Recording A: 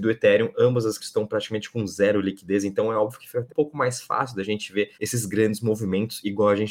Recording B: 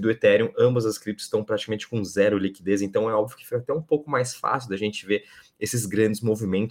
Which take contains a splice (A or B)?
A